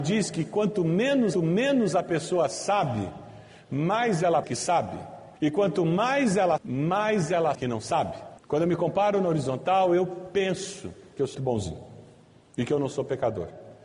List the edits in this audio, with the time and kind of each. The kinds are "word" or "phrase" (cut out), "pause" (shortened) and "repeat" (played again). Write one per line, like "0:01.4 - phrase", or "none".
0:01.3 - repeat
0:04.4 - word
0:05.4 - pause
0:06.6 - word
0:07.5 - word
0:11.3 - word